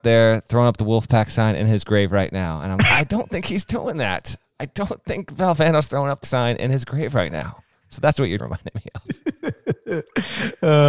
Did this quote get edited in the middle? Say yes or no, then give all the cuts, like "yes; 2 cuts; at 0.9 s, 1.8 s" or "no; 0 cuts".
yes; 3 cuts; at 2.8 s, 6.2 s, 8.4 s